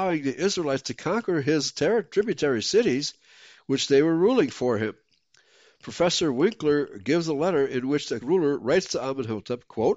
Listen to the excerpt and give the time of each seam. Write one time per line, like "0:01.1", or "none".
0:08.2